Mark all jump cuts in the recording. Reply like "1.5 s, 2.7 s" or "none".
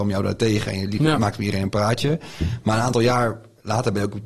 none